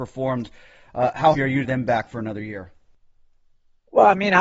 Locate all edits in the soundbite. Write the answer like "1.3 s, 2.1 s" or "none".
1.3 s, 1.6 s